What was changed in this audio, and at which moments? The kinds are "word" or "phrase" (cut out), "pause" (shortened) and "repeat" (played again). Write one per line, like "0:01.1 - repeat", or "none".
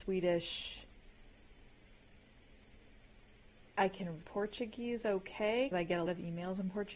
0:04.2 - word
0:05.7 - word
0:06.1 - word